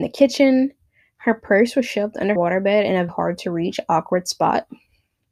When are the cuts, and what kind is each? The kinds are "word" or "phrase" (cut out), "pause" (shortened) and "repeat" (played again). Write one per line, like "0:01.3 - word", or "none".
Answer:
0:02.4 - word
0:03.1 - word